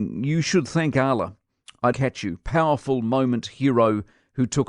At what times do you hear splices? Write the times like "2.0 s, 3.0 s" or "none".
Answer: 1.9 s